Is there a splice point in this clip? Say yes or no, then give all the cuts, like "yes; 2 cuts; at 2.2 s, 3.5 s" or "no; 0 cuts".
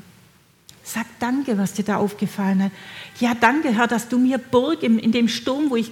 no; 0 cuts